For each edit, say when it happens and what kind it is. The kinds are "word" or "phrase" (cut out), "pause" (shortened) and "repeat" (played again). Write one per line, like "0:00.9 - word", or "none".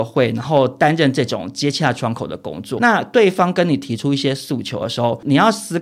0:02.8 - word